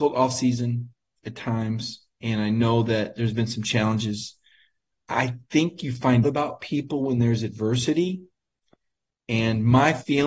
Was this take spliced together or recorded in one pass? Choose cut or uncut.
cut